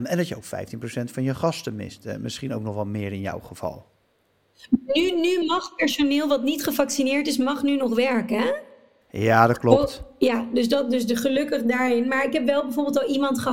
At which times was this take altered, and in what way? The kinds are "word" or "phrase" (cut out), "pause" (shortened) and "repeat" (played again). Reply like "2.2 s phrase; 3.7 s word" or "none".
none